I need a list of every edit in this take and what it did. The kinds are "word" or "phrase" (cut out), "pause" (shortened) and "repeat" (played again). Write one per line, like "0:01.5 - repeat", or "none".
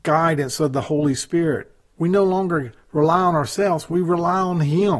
none